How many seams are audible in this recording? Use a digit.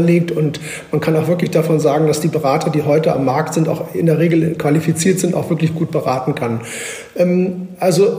0